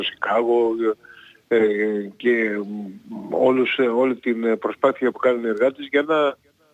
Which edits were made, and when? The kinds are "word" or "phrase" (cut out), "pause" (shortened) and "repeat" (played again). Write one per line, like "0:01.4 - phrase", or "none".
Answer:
0:05.1 - word